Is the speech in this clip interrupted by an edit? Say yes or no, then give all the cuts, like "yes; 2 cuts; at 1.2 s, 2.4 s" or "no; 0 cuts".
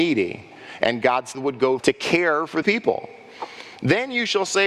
yes; 3 cuts; at 1.3 s, 1.8 s, 2.6 s